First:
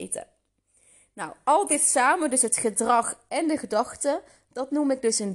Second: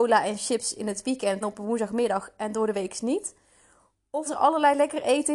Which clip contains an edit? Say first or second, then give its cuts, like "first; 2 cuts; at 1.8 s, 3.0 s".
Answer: second; 2 cuts; at 1.4 s, 4.3 s